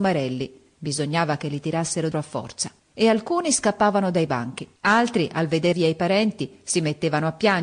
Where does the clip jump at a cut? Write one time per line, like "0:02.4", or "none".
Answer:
0:02.1
0:02.8
0:04.8
0:05.7